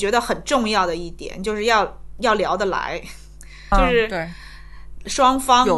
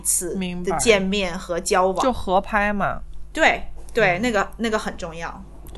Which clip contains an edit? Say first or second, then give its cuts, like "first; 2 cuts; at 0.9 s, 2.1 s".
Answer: first; 1 cut; at 3.7 s